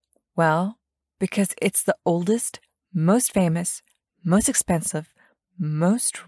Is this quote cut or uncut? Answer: uncut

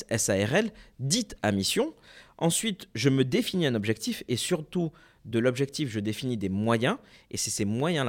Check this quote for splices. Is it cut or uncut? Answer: uncut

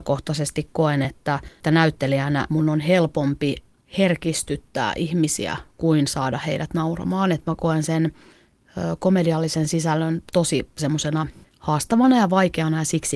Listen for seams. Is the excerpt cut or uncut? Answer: uncut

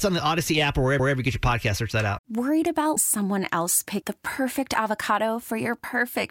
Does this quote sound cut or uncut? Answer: cut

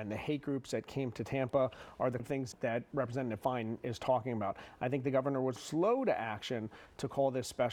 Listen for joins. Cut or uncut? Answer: cut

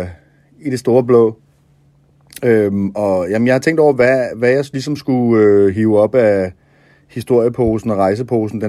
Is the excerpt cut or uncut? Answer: uncut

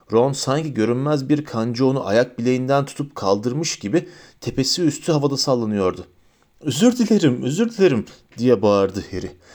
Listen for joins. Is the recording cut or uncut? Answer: uncut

